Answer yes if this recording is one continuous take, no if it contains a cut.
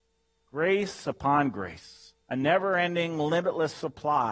no